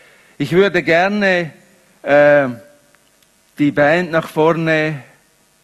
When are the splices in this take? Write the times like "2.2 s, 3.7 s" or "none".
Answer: none